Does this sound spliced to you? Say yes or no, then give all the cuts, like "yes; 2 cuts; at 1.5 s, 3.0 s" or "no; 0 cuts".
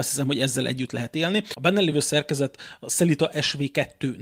no; 0 cuts